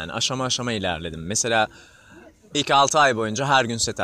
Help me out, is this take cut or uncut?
uncut